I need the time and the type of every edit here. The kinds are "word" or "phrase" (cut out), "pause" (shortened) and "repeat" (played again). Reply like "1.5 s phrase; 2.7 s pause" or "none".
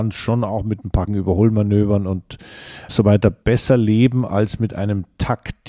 1.1 s word; 2.9 s word; 3.4 s word